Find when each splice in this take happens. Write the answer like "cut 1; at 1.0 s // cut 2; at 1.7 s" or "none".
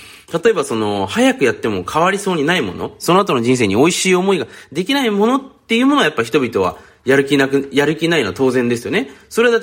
none